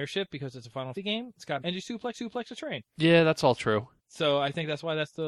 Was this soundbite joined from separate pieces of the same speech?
yes; 5 cuts; at 0.9 s, 1.6 s, 2.1 s, 2.9 s, 4.0 s

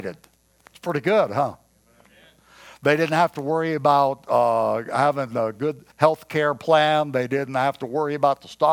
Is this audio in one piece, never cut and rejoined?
no; 1 cut; at 5.9 s

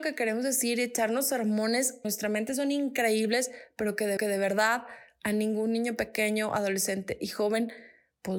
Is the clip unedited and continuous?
no; 2 cuts; at 2.0 s, 4.2 s

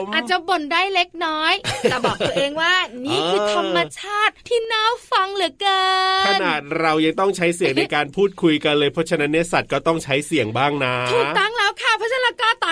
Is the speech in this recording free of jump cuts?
no; 1 cut; at 4.4 s

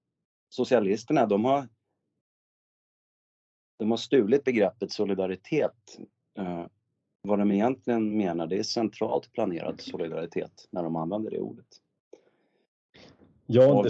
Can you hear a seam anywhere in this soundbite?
no; 0 cuts

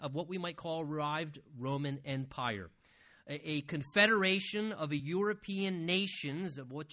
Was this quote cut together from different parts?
no; 0 cuts

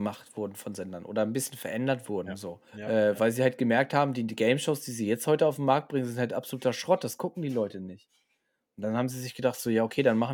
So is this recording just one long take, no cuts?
no; 1 cut; at 2.7 s

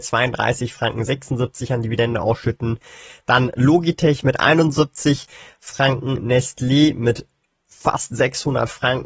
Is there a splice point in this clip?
no; 0 cuts

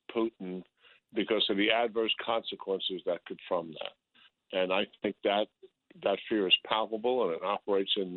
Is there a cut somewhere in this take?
yes; 1 cut; at 3.4 s

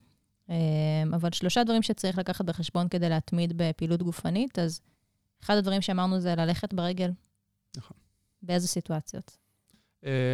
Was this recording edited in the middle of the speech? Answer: no; 0 cuts

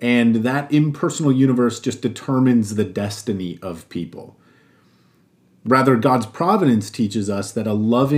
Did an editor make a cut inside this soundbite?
no; 0 cuts

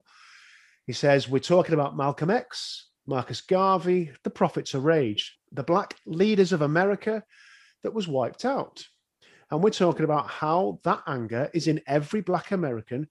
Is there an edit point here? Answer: no; 0 cuts

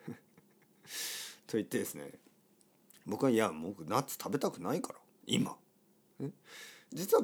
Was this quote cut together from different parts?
no; 0 cuts

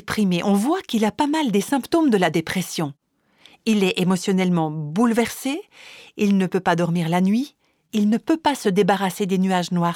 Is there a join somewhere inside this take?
no; 0 cuts

